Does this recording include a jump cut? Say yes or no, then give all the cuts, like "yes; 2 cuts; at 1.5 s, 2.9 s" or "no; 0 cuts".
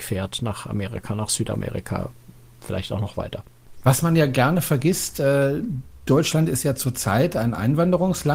yes; 1 cut; at 2.4 s